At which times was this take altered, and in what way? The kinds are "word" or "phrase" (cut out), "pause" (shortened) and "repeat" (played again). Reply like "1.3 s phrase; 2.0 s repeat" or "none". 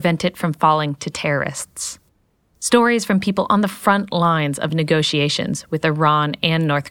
none

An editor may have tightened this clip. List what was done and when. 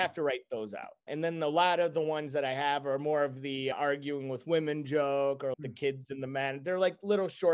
5.5 s word

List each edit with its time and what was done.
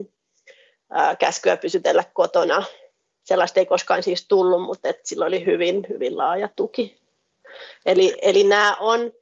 none

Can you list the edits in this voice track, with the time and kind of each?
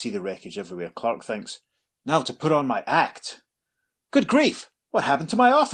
none

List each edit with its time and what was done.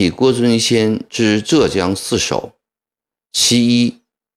none

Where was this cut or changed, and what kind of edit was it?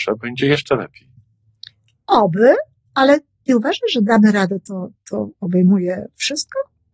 none

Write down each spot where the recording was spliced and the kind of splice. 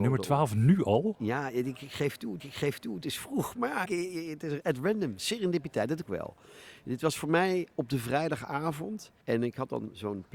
2.4 s repeat; 3.8 s word; 6.1 s phrase; 9.2 s pause

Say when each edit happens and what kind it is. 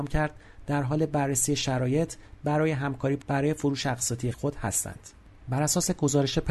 3.2 s phrase; 4.3 s word

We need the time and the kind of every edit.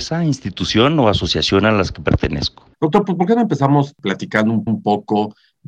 2.7 s pause; 4.7 s repeat

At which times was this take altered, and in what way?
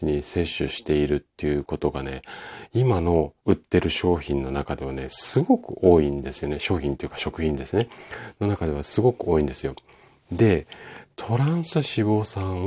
3.4 s pause

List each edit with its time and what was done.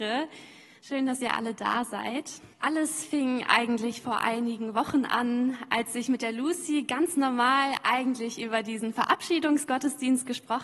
2.5 s pause

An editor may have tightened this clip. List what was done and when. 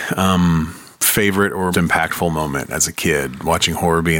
0.9 s phrase; 1.7 s word

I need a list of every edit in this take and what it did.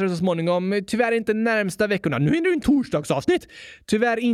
2.6 s phrase

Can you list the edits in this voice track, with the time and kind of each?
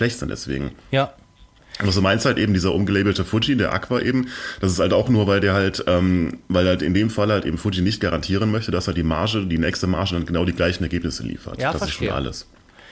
none

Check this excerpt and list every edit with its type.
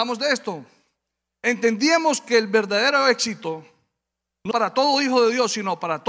4.5 s word

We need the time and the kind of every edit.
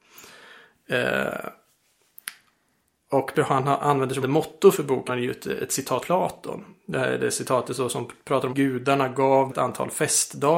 3.3 s word; 4.2 s word; 5.1 s word; 6.0 s word; 8.5 s word; 9.5 s word

